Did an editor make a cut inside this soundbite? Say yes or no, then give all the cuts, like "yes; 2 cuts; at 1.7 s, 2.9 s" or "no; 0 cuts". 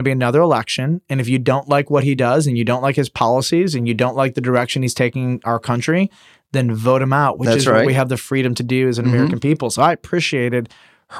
no; 0 cuts